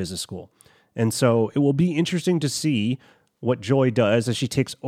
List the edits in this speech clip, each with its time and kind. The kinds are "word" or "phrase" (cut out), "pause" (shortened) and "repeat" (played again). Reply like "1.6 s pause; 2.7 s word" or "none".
none